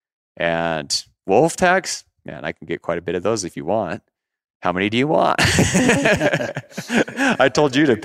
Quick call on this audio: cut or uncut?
uncut